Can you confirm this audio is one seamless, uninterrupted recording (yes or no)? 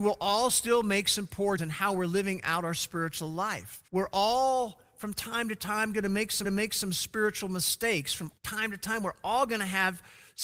no